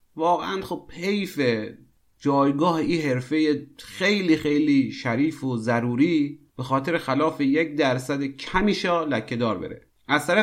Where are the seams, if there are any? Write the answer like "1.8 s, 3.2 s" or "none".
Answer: none